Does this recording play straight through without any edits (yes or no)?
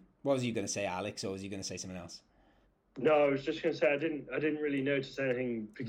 no